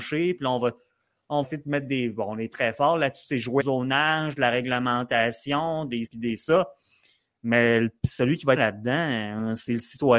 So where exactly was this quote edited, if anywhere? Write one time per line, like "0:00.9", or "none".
0:01.4
0:03.6
0:06.1
0:08.6